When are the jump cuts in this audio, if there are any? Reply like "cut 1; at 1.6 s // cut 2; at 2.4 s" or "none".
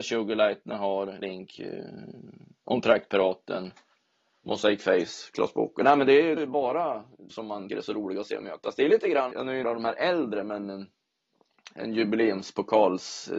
cut 1; at 1.2 s // cut 2; at 6.4 s // cut 3; at 7.3 s // cut 4; at 7.7 s // cut 5; at 9.3 s // cut 6; at 9.6 s